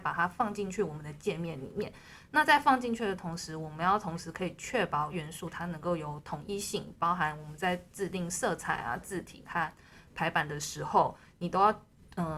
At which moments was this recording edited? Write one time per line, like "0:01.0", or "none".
0:05.1